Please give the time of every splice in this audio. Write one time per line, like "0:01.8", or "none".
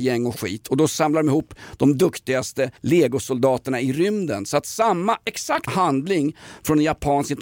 0:02.8
0:05.7